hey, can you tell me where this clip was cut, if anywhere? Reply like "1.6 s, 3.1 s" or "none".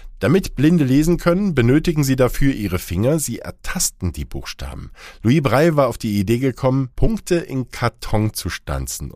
6.9 s